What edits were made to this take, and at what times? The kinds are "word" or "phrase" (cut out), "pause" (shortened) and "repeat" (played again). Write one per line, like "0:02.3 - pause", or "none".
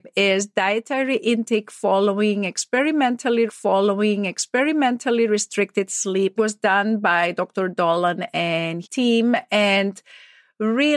0:03.5 - repeat
0:06.4 - phrase
0:08.8 - word

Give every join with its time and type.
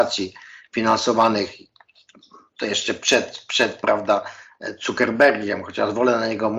none

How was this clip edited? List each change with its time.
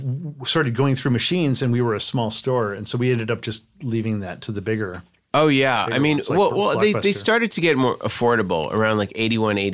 none

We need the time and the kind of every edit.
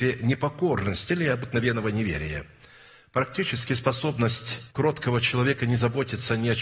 0:01.1 - phrase
0:04.7 - pause

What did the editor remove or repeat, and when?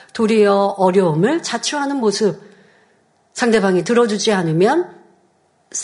none

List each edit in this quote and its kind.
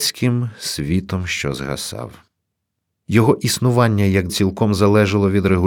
0:04.3 - word

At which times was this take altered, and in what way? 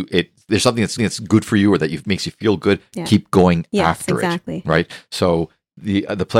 0:01.0 - repeat

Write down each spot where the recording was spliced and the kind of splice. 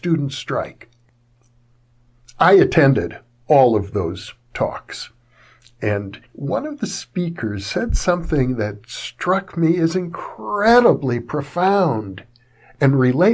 0:06.3 - pause

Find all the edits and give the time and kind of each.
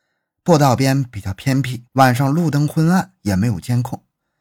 0:01.9 - pause

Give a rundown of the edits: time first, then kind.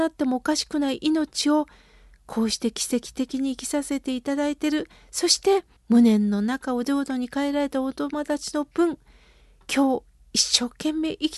0:05.8 - pause

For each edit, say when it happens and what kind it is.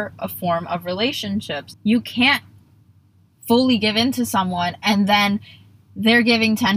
none

